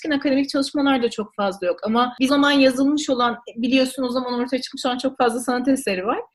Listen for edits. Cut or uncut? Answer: cut